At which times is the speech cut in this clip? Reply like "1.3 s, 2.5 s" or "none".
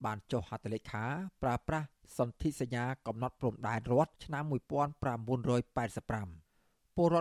4.2 s